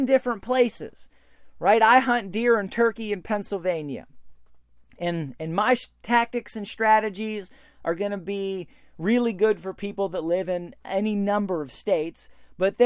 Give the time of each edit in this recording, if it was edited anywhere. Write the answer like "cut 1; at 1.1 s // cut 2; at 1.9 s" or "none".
none